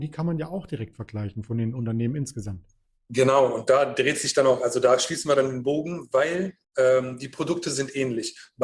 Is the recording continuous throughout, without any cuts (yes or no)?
no